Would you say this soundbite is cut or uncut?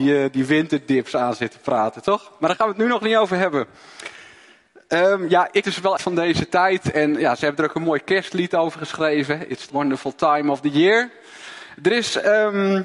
cut